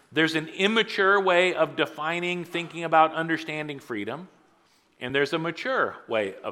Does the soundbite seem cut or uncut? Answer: uncut